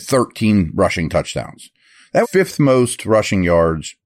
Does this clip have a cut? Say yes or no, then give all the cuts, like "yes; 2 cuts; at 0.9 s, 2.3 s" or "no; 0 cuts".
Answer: yes; 1 cut; at 2.2 s